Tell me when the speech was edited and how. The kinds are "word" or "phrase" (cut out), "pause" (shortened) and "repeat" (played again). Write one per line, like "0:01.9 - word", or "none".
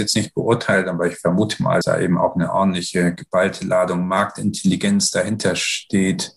0:01.8 - word